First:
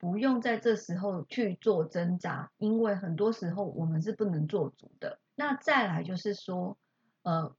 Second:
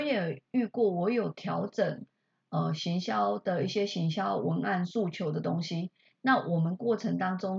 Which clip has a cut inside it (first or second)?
first